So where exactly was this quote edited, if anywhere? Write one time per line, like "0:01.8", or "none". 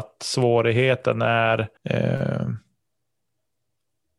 0:01.8